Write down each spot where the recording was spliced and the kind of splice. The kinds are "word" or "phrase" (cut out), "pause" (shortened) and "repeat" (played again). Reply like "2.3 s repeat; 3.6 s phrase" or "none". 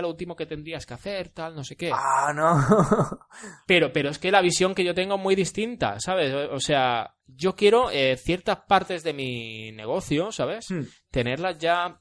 none